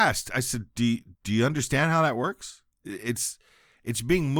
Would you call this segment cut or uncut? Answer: cut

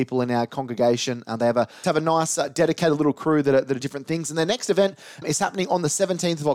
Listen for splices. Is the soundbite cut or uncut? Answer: cut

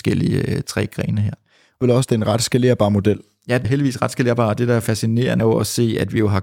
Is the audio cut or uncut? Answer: cut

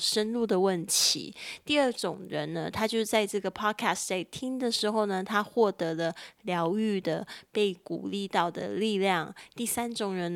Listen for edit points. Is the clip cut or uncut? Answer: uncut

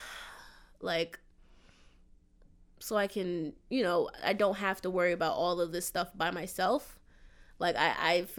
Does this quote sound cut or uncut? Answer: uncut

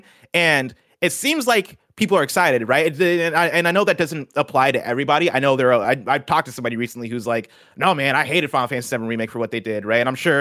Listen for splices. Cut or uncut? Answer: uncut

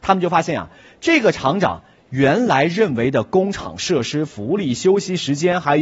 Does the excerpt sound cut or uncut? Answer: uncut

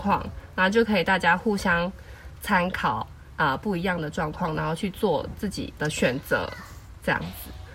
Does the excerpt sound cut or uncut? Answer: cut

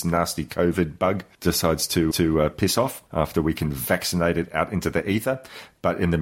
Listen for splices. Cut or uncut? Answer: cut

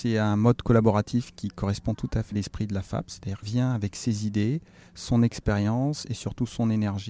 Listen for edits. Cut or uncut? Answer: cut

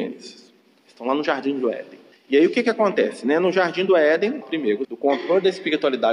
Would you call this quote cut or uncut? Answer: cut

